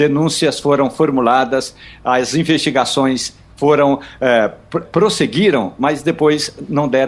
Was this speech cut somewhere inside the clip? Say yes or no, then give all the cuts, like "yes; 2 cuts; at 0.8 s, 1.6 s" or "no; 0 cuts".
yes; 1 cut; at 4.8 s